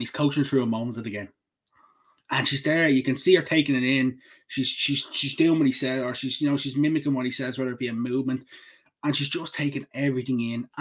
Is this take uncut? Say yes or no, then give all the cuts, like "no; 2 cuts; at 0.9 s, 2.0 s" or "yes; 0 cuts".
yes; 0 cuts